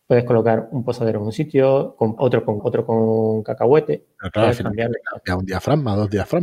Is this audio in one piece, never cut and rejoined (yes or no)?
no